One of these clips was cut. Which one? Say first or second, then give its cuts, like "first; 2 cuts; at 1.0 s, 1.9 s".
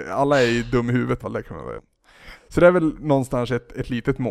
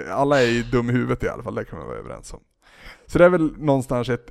first; 2 cuts; at 1.2 s, 1.8 s